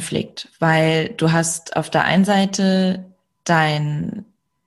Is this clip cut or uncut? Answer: uncut